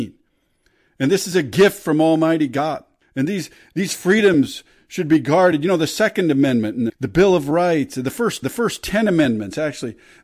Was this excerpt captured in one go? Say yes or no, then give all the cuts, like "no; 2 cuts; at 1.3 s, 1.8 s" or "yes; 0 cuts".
no; 2 cuts; at 6.9 s, 8.4 s